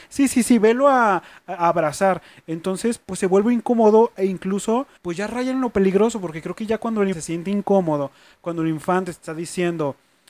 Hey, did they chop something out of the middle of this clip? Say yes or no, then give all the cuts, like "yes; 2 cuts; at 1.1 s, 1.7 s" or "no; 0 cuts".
yes; 2 cuts; at 5.0 s, 7.1 s